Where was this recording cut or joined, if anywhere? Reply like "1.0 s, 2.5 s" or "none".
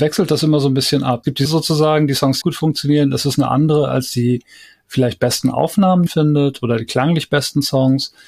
1.4 s, 2.4 s, 6.1 s